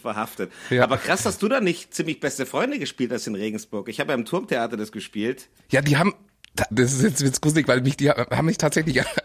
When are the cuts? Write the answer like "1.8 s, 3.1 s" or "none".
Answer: 6.7 s